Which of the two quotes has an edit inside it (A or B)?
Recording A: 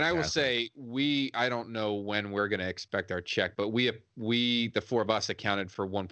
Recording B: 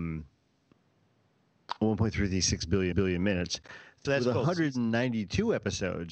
B